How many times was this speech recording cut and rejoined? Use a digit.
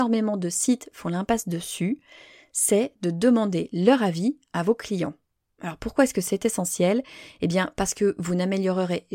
0